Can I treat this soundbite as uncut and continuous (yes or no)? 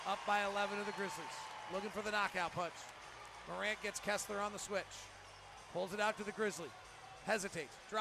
yes